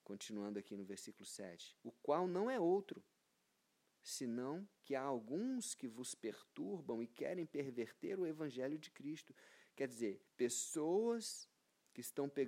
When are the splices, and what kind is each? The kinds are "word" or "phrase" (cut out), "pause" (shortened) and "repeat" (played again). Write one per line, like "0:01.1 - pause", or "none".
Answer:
0:01.8 - pause
0:04.8 - pause
0:10.3 - pause